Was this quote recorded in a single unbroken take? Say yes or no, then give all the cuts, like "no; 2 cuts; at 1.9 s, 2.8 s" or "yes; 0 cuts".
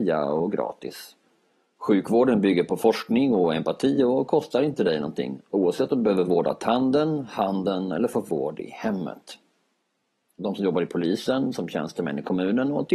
yes; 0 cuts